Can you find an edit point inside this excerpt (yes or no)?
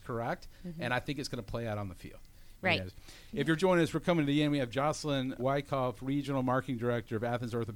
yes